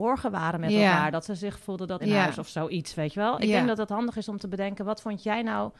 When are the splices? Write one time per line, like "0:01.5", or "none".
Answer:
0:01.6
0:02.0